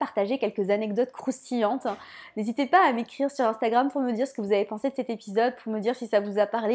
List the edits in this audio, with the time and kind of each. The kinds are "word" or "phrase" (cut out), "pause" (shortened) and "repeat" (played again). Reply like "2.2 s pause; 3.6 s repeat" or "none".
none